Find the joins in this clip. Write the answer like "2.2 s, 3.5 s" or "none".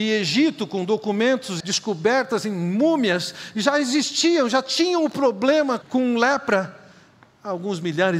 1.6 s, 5.8 s

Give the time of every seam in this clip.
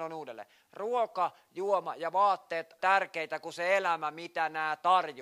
2.8 s

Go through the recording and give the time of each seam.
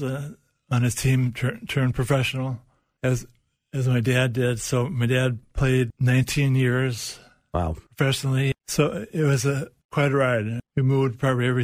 none

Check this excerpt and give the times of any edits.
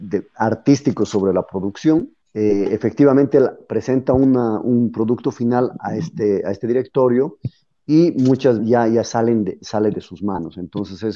2.2 s, 8.6 s

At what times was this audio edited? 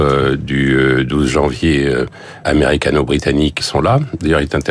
2.4 s, 3.6 s

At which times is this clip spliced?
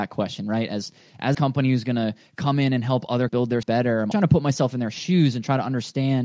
1.3 s, 3.3 s, 3.6 s, 4.1 s

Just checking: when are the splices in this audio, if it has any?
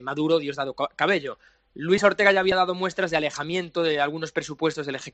none

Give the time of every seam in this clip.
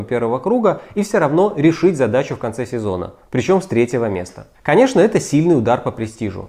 4.5 s

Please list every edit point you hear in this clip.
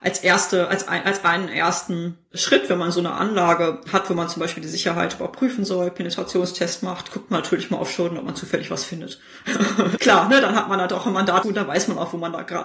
10.0 s, 11.4 s

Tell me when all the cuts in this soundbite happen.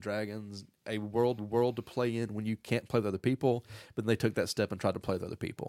1.4 s

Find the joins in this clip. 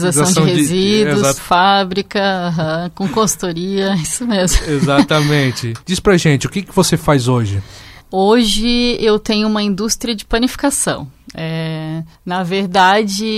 1.4 s, 5.8 s, 8.0 s, 12.1 s

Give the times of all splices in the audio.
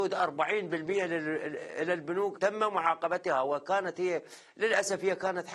2.3 s

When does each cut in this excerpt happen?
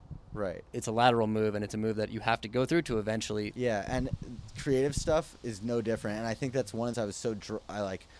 3.5 s, 6.9 s

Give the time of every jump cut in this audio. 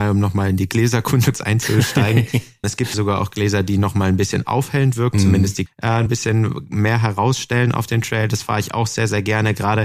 1.3 s, 2.6 s, 2.9 s, 5.1 s, 5.7 s, 6.1 s

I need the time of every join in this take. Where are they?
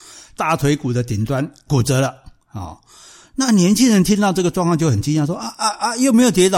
none

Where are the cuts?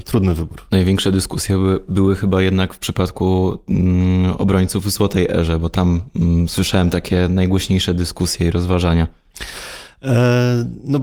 none

